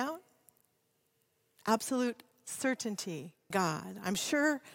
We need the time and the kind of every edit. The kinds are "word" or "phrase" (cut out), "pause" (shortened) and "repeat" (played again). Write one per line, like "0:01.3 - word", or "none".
0:03.5 - word